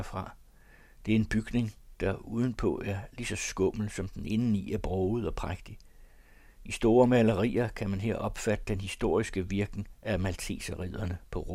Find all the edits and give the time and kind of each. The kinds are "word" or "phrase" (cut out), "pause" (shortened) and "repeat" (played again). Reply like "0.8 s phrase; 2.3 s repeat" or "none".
none

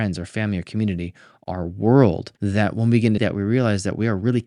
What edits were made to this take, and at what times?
2.4 s pause; 3.2 s phrase

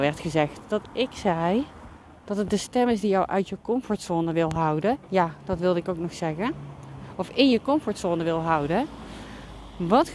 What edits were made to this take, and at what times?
2.0 s pause

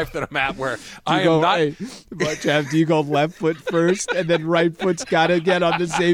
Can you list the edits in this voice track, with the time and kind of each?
none

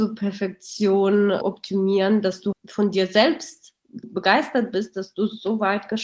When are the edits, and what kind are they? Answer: 1.4 s word; 2.5 s word; 4.0 s word

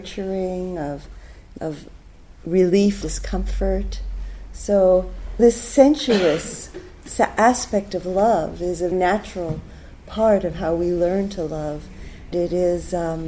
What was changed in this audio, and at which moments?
1.6 s word; 3.0 s word; 5.4 s word; 8.9 s word; 12.3 s word

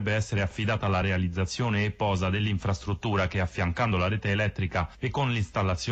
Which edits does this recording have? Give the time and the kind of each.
none

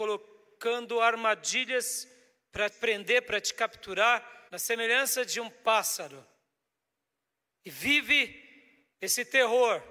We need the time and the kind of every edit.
2.7 s word; 4.5 s pause; 8.9 s pause

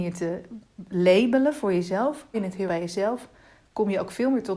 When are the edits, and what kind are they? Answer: 2.3 s word; 2.7 s word

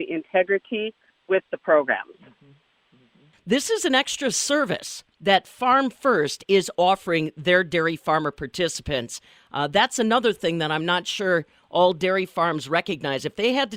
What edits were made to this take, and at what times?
none

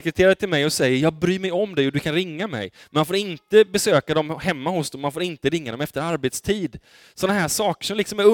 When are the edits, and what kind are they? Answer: none

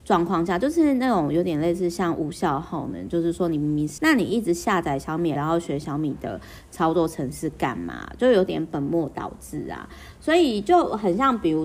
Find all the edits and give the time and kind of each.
4.0 s phrase; 5.4 s word

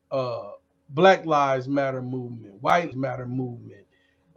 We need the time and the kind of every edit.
2.9 s word

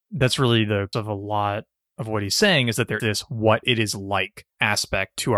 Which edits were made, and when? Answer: 0.9 s word; 3.0 s word

